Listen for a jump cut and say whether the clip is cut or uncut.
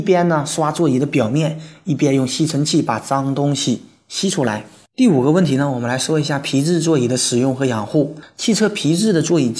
uncut